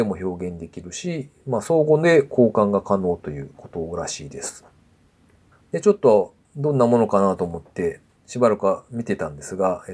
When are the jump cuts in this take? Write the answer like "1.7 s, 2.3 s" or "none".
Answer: 6.4 s, 8.2 s